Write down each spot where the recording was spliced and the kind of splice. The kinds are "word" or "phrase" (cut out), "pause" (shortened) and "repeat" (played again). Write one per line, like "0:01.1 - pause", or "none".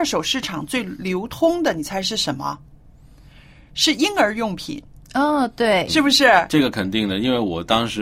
0:05.9 - word